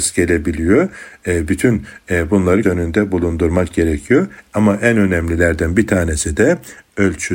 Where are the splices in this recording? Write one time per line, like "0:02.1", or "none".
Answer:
0:02.6

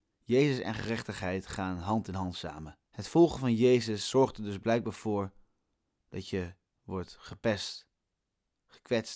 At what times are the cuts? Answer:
0:02.8

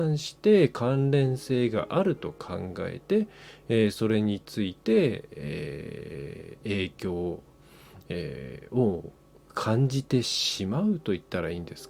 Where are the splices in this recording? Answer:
none

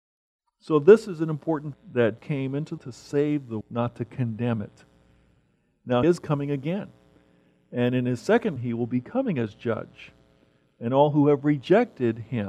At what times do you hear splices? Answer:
0:01.7
0:02.2
0:02.8
0:03.6
0:06.0
0:08.6

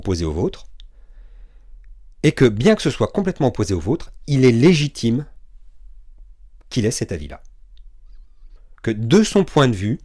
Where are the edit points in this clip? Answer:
none

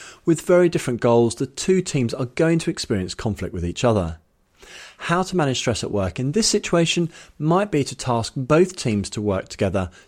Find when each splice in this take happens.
none

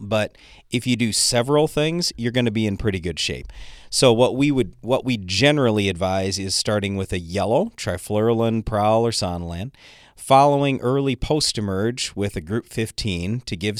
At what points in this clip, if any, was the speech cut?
none

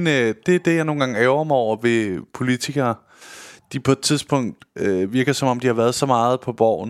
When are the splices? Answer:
none

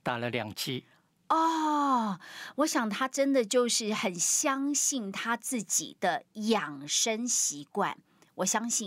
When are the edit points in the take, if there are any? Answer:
none

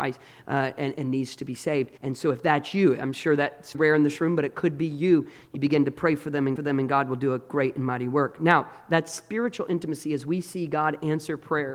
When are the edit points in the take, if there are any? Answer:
0:02.0
0:03.7
0:06.6

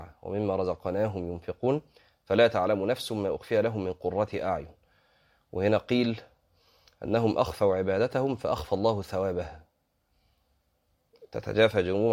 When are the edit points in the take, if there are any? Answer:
none

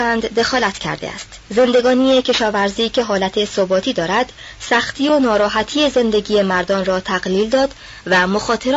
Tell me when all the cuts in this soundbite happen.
0:01.5

